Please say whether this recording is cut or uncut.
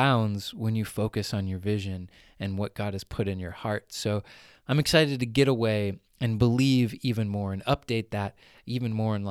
uncut